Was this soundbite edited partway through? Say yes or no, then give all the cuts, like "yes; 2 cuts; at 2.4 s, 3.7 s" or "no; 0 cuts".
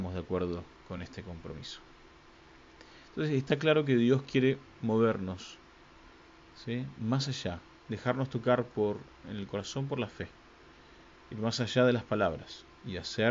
no; 0 cuts